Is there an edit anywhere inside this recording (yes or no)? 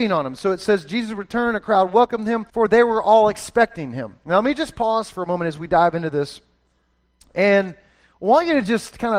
yes